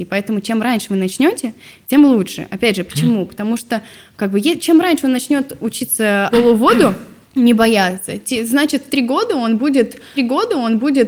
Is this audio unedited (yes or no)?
no